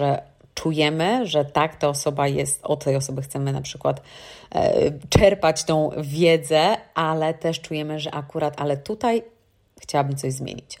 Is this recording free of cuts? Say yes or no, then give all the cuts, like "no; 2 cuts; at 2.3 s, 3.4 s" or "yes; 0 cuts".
yes; 0 cuts